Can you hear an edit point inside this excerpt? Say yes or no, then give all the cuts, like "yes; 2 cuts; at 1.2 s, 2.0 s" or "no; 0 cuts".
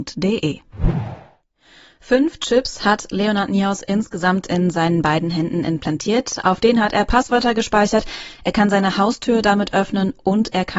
no; 0 cuts